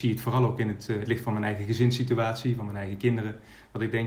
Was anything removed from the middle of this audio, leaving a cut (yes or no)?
yes